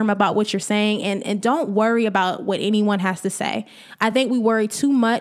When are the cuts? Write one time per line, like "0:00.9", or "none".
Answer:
none